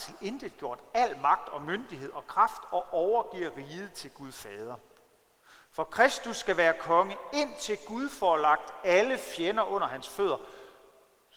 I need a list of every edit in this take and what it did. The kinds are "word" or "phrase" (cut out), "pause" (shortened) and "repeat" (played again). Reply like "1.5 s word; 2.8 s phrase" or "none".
none